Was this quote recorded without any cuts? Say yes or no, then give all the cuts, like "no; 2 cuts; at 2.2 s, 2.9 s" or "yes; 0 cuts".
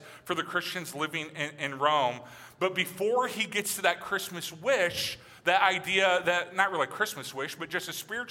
yes; 0 cuts